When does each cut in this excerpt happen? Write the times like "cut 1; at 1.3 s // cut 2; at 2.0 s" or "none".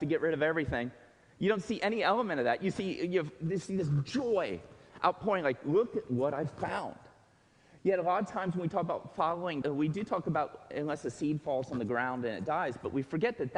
cut 1; at 9.6 s